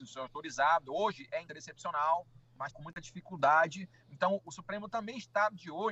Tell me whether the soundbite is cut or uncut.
cut